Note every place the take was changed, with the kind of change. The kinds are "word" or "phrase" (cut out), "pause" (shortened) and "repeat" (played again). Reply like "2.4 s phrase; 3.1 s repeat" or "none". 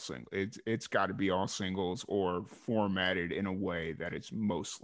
none